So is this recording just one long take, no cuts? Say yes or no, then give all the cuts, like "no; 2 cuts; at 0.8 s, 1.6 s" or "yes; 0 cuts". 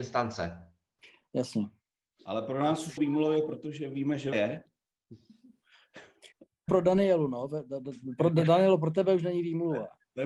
no; 3 cuts; at 3.0 s, 4.3 s, 6.7 s